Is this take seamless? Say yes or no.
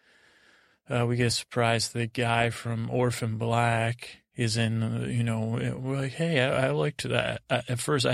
yes